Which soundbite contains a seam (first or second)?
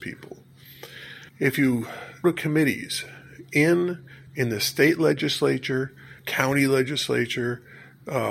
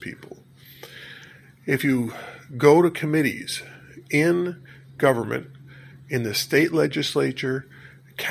first